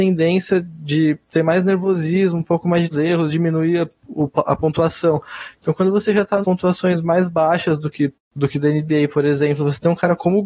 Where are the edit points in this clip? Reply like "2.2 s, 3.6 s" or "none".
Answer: 1.2 s, 2.9 s, 6.4 s, 8.1 s